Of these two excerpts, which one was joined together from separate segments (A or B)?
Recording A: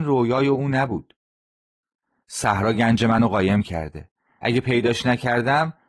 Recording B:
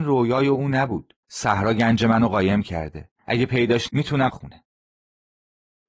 B